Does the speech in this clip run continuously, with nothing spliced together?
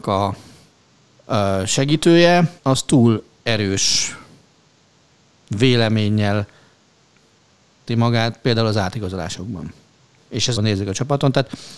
no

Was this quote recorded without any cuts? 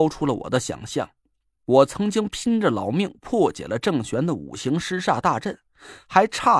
yes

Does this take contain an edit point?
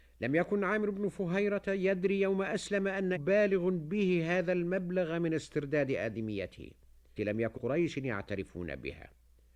yes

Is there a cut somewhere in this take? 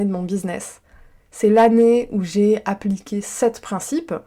no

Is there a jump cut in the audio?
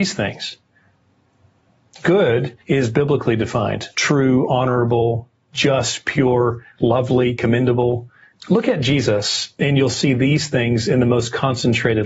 yes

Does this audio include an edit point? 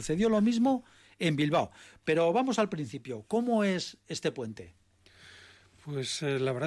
no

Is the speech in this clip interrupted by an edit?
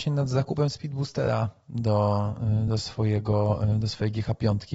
no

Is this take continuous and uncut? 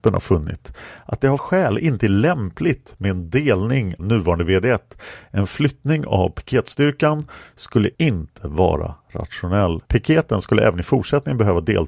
no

